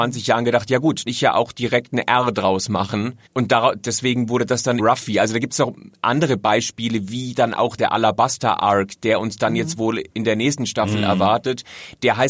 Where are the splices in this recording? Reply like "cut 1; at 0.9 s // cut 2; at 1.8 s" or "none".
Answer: cut 1; at 1.1 s // cut 2; at 3.3 s // cut 3; at 4.8 s // cut 4; at 7.8 s // cut 5; at 10.1 s

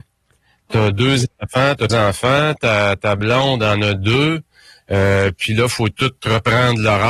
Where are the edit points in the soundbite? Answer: cut 1; at 1.9 s

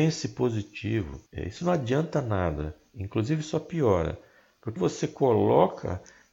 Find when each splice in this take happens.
cut 1; at 1.3 s // cut 2; at 4.8 s

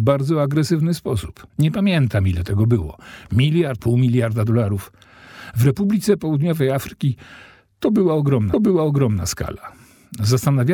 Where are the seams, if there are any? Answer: cut 1; at 1.5 s // cut 2; at 3.8 s // cut 3; at 8.5 s

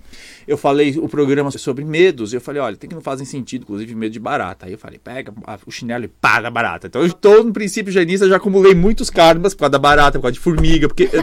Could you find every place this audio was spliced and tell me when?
cut 1; at 1.5 s // cut 2; at 2.9 s // cut 3; at 3.6 s // cut 4; at 7.1 s

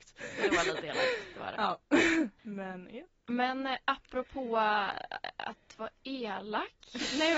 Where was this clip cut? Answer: cut 1; at 2.4 s // cut 2; at 3.2 s

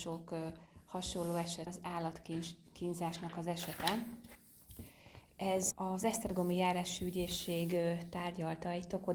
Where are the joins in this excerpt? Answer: cut 1; at 1.7 s // cut 2; at 5.7 s

